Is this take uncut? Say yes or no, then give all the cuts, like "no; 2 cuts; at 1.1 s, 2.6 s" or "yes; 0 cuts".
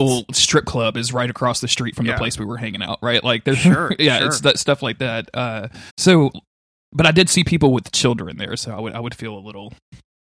no; 1 cut; at 5.9 s